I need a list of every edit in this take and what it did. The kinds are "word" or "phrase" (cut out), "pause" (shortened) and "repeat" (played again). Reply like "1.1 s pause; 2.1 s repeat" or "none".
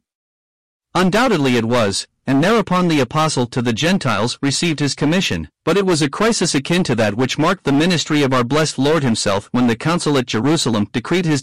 5.5 s pause